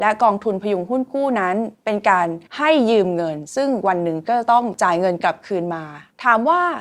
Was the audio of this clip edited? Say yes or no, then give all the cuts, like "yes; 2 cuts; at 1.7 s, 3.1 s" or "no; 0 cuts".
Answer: yes; 2 cuts; at 1.7 s, 2.5 s